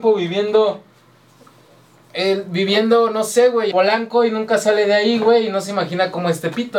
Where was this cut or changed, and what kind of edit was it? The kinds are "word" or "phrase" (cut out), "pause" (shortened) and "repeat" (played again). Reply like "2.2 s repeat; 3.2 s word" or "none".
3.7 s word